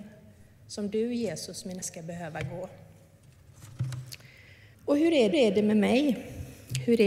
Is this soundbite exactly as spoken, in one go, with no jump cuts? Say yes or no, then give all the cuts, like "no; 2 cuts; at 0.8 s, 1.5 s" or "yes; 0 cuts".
no; 3 cuts; at 1.8 s, 4.7 s, 5.3 s